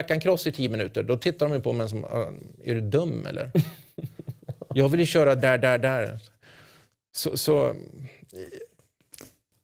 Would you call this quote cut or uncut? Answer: cut